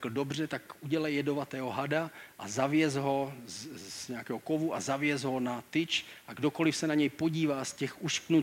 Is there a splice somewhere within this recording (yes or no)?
no